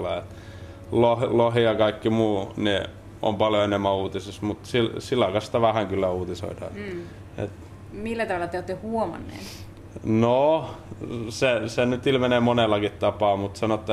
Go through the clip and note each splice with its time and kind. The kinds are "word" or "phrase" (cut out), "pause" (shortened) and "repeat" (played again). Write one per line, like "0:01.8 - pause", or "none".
none